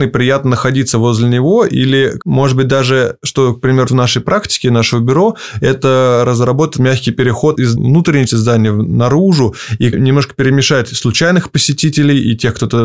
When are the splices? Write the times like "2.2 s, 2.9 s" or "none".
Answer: 3.9 s, 6.8 s, 8.3 s